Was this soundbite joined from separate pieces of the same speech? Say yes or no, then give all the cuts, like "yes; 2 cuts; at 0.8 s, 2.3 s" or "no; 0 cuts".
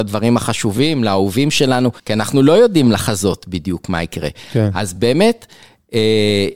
yes; 1 cut; at 2.0 s